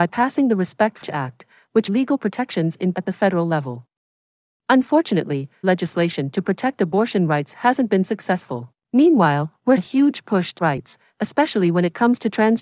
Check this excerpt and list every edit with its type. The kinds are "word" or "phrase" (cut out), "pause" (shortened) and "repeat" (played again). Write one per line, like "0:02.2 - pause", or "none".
0:01.0 - word
0:01.9 - phrase
0:02.9 - word
0:05.6 - word
0:08.8 - pause
0:09.8 - word
0:10.6 - phrase

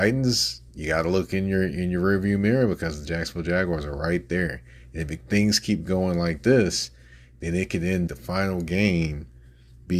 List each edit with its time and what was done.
0:08.1 - phrase

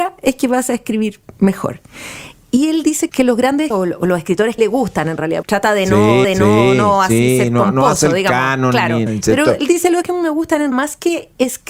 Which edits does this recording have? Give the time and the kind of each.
0:03.1 - word
0:03.7 - word
0:04.6 - phrase
0:05.4 - phrase
0:06.2 - repeat
0:09.1 - word
0:10.0 - word
0:10.7 - word

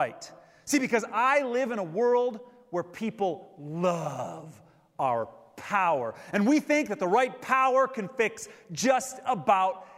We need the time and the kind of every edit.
none

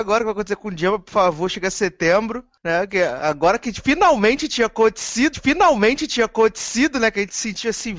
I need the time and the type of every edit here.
0:05.3 - repeat

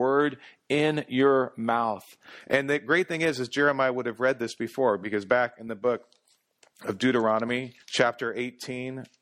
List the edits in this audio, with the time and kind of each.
0:07.8 - pause

